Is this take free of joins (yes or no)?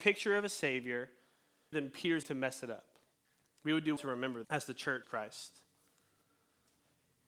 no